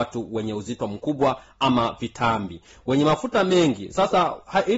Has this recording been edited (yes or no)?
no